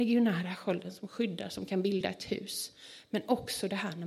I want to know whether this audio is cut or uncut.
uncut